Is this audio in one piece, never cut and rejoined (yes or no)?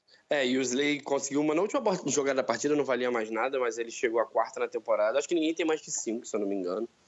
yes